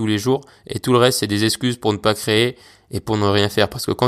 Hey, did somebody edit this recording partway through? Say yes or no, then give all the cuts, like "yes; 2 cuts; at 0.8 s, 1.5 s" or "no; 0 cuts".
no; 0 cuts